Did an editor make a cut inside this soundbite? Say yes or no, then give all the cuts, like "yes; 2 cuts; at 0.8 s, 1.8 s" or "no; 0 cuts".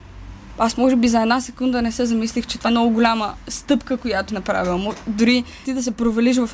yes; 3 cuts; at 2.6 s, 4.3 s, 5.6 s